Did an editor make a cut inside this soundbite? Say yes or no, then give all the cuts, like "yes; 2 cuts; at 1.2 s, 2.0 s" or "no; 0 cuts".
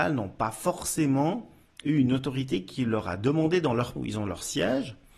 yes; 1 cut; at 4.0 s